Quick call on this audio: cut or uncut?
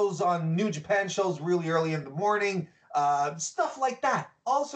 uncut